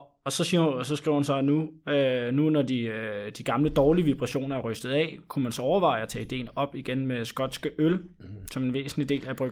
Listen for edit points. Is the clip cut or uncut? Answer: uncut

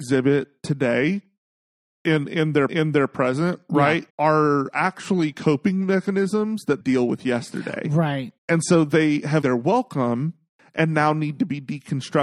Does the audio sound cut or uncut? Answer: cut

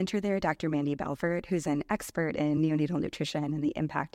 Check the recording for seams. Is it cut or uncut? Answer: uncut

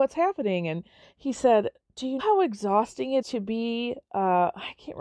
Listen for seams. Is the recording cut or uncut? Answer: cut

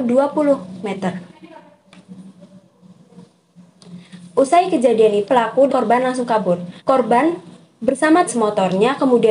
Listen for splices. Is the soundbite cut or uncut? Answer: cut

